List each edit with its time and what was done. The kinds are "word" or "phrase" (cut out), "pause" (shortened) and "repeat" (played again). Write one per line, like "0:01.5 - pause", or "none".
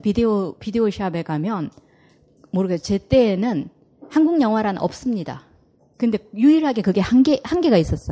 none